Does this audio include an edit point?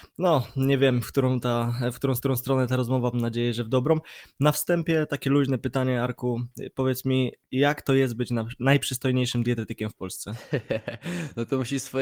yes; 2 cuts; at 2.2 s, 3.1 s

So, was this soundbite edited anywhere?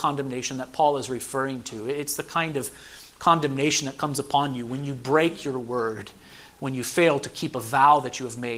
no; 0 cuts

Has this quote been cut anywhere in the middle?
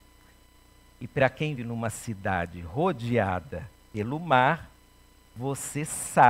yes; 1 cut; at 1.6 s

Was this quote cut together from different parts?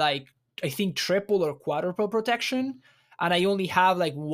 no; 0 cuts

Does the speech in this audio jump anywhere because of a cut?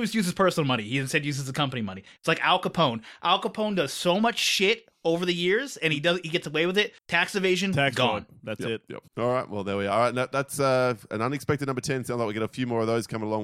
yes; 2 cuts; at 7.0 s, 9.1 s

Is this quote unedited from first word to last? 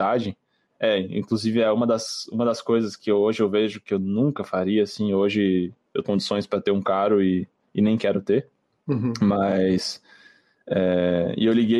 no; 1 cut; at 6.0 s

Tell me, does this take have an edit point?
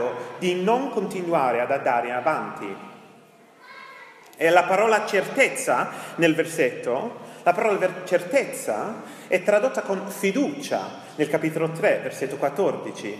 no; 0 cuts

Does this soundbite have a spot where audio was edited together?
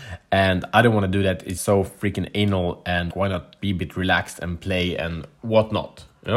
yes; 3 cuts; at 1.6 s, 3.1 s, 3.6 s

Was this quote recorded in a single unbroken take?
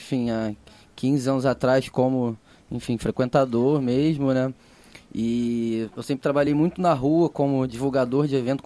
yes; 0 cuts

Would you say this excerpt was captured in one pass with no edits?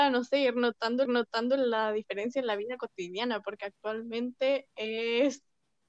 no; 1 cut; at 1.1 s

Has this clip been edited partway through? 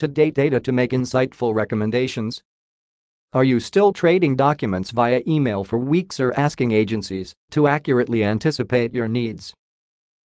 no; 0 cuts

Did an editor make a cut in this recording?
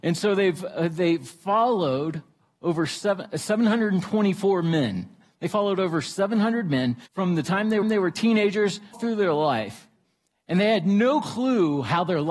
yes; 3 cuts; at 7.1 s, 7.8 s, 8.9 s

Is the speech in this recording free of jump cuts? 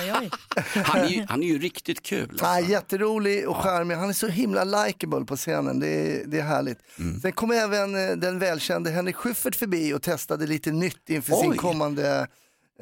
yes; 0 cuts

